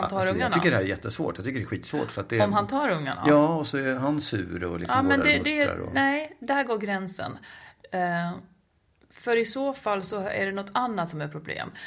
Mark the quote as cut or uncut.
uncut